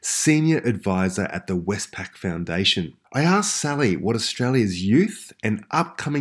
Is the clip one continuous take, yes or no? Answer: no